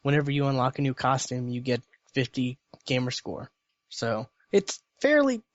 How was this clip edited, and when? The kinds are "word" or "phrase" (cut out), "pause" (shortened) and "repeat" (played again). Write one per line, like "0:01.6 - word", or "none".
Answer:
none